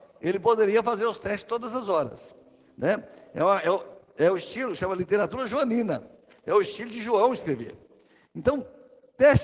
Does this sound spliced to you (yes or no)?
no